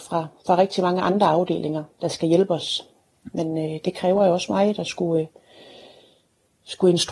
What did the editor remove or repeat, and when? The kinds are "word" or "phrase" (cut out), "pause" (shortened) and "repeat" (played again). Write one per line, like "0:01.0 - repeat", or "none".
none